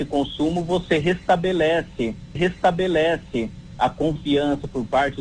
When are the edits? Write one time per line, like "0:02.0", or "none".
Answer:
0:02.4